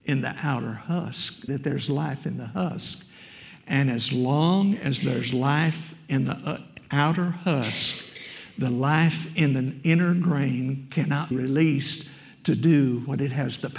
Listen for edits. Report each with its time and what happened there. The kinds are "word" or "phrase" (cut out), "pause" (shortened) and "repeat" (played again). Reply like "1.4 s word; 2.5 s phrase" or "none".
1.5 s word; 11.3 s word

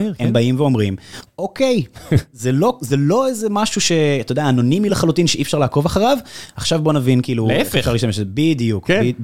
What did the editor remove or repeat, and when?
none

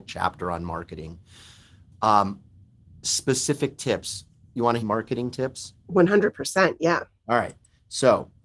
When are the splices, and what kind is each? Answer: 4.8 s phrase

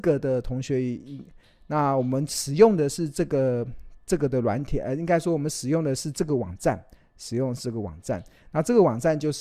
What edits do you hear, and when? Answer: none

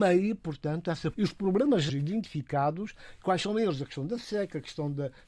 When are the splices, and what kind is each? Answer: 1.1 s word; 1.9 s word

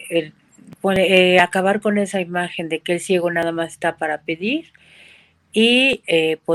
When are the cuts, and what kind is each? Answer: none

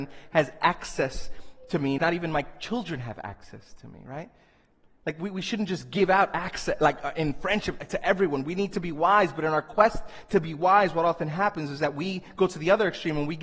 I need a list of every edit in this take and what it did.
2.0 s word

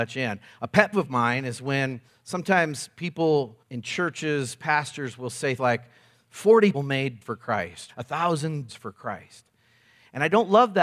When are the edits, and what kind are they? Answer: 0.9 s word; 2.1 s pause; 3.6 s pause; 5.6 s word; 6.7 s word; 7.2 s word; 7.9 s phrase; 8.7 s word

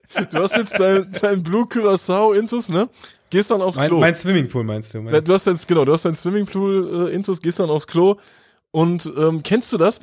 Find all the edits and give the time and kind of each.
none

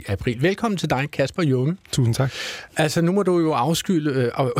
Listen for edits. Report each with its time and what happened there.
none

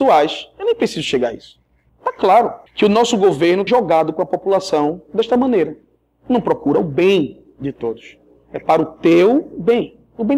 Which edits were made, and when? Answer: 1.9 s pause; 2.7 s pause; 3.7 s word

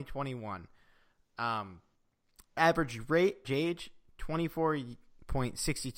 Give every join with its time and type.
2.6 s word; 3.4 s word

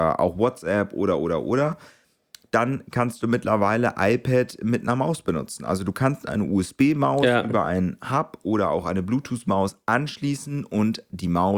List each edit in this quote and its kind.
none

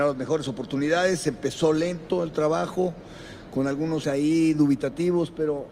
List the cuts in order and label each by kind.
4.0 s word

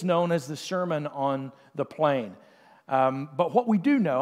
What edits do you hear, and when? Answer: none

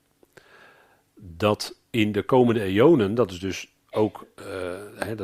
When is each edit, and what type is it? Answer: 3.8 s pause

